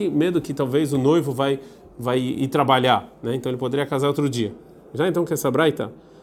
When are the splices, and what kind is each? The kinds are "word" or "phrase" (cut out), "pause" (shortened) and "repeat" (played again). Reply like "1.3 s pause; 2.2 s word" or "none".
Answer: none